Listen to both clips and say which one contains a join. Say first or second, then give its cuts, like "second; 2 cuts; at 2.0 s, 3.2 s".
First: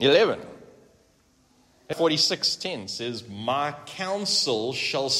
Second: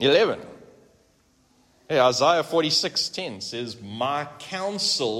first; 1 cut; at 1.9 s